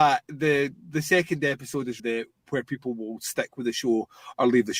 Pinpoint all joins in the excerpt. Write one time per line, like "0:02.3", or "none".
0:02.0